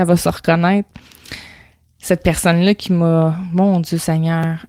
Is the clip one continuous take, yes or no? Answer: yes